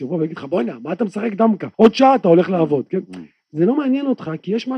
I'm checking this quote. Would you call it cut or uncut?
cut